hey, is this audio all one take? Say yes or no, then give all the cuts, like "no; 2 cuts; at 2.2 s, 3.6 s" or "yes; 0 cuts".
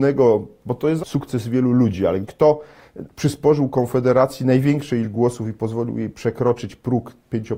no; 3 cuts; at 1.0 s, 2.2 s, 5.0 s